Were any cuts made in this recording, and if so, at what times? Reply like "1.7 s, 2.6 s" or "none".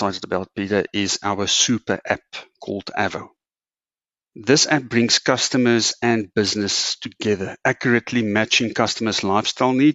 none